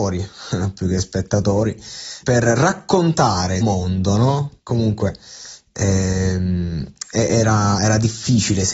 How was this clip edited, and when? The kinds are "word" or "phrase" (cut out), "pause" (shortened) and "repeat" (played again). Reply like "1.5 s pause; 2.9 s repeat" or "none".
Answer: 2.2 s word; 3.6 s phrase; 4.6 s pause